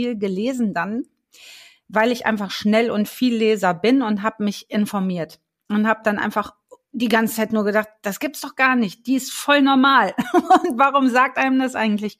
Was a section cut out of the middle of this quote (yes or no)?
no